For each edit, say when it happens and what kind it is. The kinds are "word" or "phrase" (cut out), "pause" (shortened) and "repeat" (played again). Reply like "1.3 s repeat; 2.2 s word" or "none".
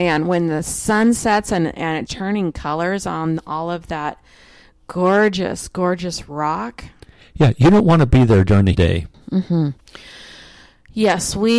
2.1 s word; 8.7 s phrase